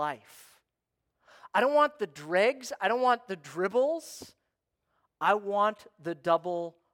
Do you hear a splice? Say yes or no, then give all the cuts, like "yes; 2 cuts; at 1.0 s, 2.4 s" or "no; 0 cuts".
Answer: no; 0 cuts